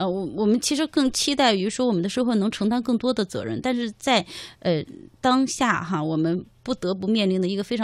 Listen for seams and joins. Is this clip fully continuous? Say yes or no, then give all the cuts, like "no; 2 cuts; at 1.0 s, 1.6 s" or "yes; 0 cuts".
yes; 0 cuts